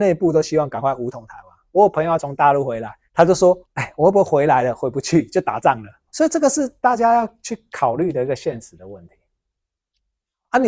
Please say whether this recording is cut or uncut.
cut